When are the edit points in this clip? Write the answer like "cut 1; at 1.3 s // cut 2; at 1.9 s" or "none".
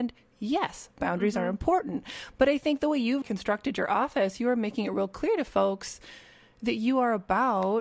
cut 1; at 3.2 s